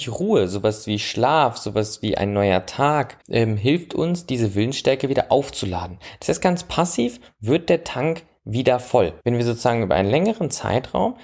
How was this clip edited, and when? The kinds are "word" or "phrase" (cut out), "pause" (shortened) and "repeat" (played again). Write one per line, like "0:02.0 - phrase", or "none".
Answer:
0:03.2 - pause
0:09.2 - pause